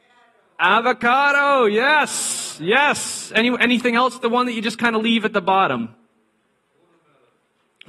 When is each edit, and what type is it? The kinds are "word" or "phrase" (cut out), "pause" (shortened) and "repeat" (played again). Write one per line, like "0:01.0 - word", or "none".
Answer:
none